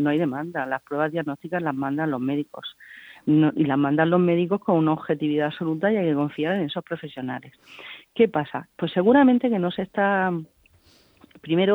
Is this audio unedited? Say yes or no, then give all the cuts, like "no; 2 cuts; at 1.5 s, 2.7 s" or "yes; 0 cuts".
yes; 0 cuts